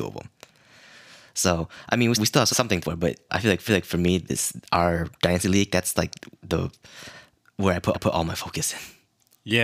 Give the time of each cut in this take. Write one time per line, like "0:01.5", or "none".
0:02.2
0:02.5
0:02.8
0:03.3
0:03.7
0:06.3
0:07.9